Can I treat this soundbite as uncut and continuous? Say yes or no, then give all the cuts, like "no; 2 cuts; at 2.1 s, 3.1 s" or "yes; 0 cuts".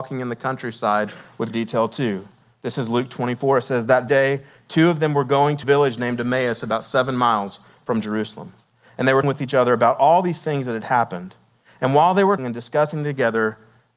no; 5 cuts; at 1.5 s, 4.1 s, 5.6 s, 9.2 s, 12.4 s